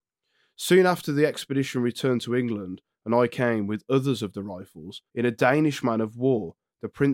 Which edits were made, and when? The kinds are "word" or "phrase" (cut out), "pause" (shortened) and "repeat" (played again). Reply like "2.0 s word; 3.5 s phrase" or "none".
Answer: 5.1 s pause